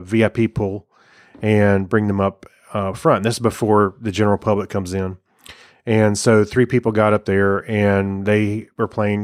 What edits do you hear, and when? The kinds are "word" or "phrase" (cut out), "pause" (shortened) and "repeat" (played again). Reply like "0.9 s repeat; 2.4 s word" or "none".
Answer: none